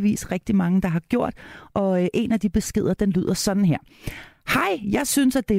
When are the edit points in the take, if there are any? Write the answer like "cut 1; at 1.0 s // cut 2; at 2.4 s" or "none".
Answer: none

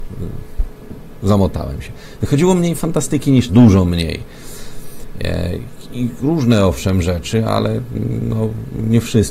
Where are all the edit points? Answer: cut 1; at 3.5 s

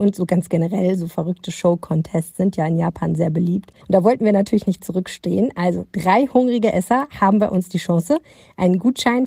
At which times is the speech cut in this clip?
cut 1; at 3.8 s

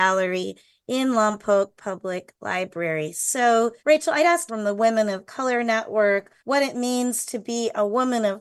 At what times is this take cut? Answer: cut 1; at 3.8 s // cut 2; at 4.5 s // cut 3; at 6.4 s

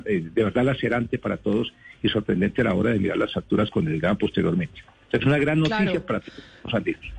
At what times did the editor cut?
none

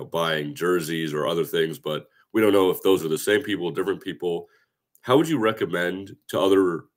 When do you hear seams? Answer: none

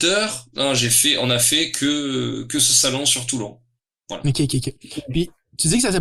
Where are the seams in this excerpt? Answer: none

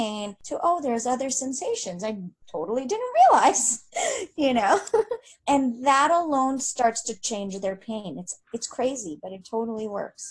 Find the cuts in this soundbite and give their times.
cut 1; at 8.4 s

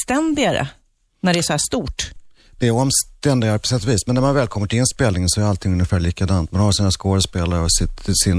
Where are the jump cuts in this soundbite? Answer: none

